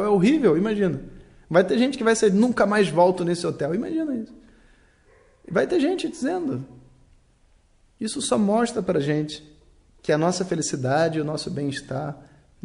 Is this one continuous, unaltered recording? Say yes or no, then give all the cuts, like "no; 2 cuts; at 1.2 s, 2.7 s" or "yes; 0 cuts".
yes; 0 cuts